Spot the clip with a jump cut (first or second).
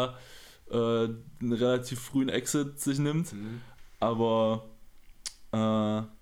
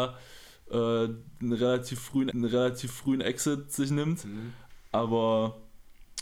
second